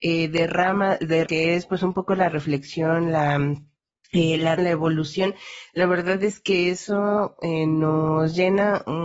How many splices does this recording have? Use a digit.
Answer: 2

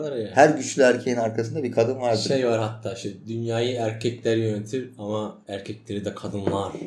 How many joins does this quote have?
1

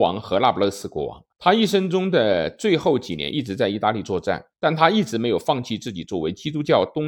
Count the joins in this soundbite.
2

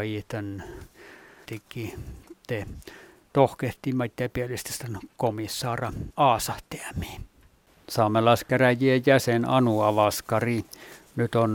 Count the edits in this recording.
2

